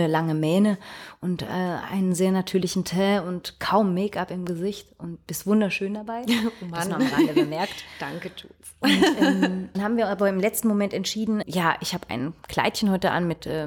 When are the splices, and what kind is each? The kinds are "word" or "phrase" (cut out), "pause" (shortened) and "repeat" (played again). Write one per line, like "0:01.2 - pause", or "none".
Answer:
0:09.7 - phrase
0:11.4 - word
0:12.4 - pause